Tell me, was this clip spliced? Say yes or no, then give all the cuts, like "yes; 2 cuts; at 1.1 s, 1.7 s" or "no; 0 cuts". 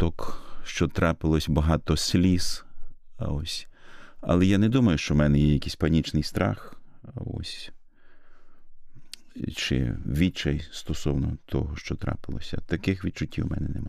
no; 0 cuts